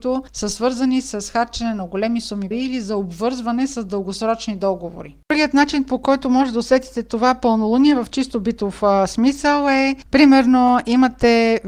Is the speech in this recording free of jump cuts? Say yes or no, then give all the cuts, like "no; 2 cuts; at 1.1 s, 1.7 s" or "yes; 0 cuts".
no; 1 cut; at 2.5 s